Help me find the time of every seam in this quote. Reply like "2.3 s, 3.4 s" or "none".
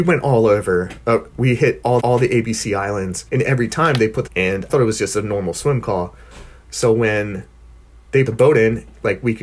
2.0 s, 3.3 s, 4.3 s, 4.7 s, 8.3 s